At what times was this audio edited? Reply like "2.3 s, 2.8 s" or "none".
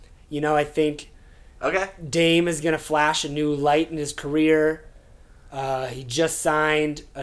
none